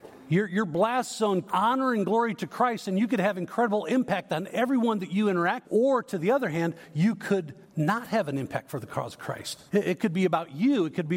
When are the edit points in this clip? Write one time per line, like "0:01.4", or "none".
0:01.5
0:05.6
0:07.6
0:09.7